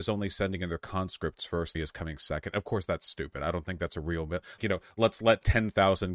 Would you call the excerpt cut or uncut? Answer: cut